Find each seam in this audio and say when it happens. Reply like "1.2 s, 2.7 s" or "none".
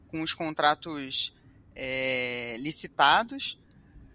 none